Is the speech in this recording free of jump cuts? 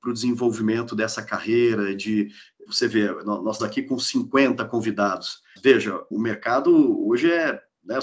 no; 4 cuts; at 2.7 s, 3.6 s, 5.6 s, 6.1 s

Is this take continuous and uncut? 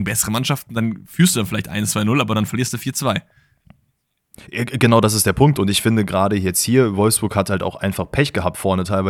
yes; 0 cuts

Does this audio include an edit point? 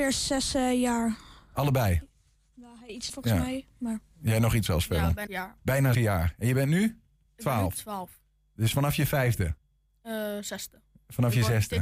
yes; 4 cuts; at 3.1 s, 4.7 s, 5.3 s, 5.9 s

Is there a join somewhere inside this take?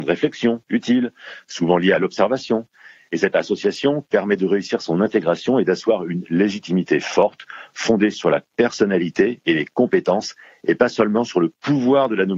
no; 0 cuts

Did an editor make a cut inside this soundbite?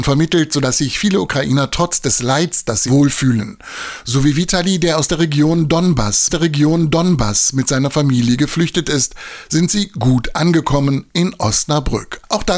yes; 2 cuts; at 2.9 s, 6.3 s

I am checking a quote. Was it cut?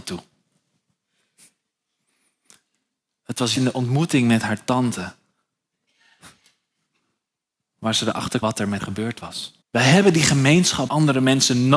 yes; 5 cuts; at 3.5 s, 8.4 s, 8.8 s, 9.6 s, 10.9 s

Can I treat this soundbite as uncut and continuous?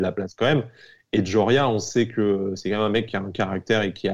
yes; 0 cuts

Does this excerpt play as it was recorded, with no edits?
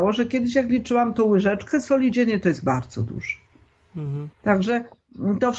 no; 1 cut; at 4.3 s

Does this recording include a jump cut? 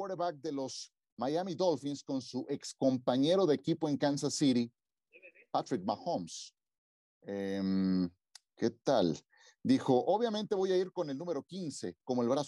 no; 0 cuts

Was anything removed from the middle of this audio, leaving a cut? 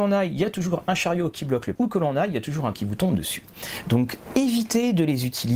yes; 2 cuts; at 1.7 s, 2.7 s

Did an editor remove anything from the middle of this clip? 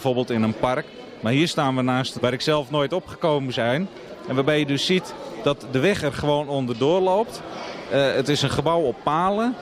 yes; 2 cuts; at 2.2 s, 3.5 s

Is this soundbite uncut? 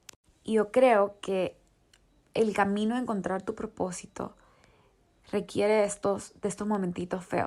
yes; 0 cuts

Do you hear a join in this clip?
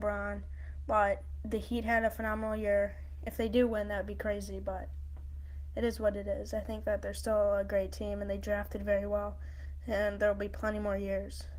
no; 0 cuts

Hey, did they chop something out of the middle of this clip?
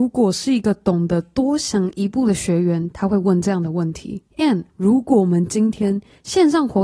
yes; 1 cut; at 4.7 s

